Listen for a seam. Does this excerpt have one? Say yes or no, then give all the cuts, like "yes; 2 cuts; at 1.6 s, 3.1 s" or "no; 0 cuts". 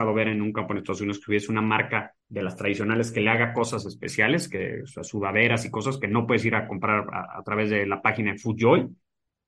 yes; 1 cut; at 2.2 s